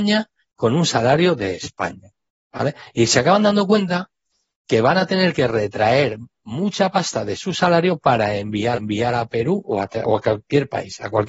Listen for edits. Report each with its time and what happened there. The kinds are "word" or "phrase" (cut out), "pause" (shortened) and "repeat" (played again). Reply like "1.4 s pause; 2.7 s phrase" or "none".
8.7 s repeat